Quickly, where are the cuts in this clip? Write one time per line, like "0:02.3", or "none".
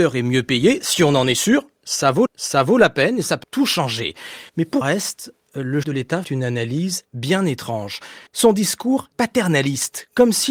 0:02.3
0:03.4
0:04.5
0:04.8
0:05.8
0:06.2
0:08.3
0:09.1